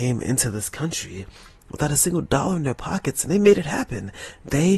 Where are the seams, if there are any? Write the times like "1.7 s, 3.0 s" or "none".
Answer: none